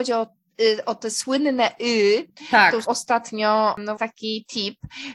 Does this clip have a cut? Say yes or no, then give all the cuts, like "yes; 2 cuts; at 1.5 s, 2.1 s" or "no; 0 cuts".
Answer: yes; 2 cuts; at 2.8 s, 4.0 s